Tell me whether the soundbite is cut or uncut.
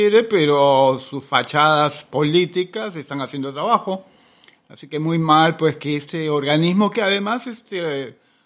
uncut